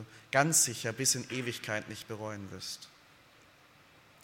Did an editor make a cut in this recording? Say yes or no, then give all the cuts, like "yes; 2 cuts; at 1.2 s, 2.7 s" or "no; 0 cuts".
no; 0 cuts